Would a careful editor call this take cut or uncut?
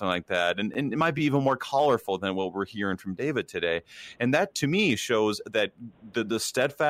uncut